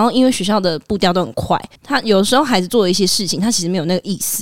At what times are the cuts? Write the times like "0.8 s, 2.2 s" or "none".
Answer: 1.8 s